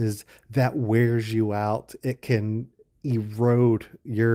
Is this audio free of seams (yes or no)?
yes